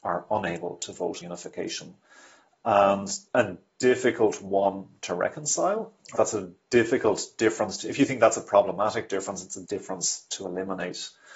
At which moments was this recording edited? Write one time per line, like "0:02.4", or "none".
0:01.2
0:03.3
0:06.1
0:09.6

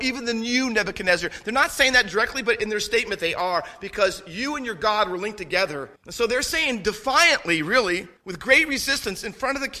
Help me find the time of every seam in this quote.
0:06.0
0:08.2

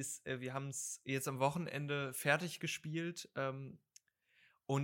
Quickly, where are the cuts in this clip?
none

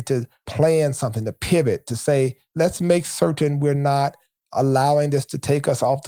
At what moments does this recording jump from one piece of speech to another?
none

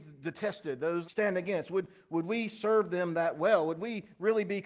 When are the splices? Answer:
0:01.0

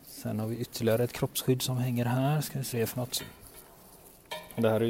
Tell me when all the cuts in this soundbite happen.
0:02.7

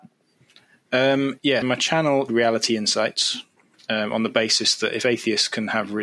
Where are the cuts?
0:01.6
0:02.3
0:03.7

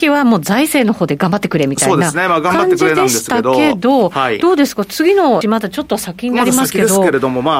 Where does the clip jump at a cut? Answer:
0:05.4

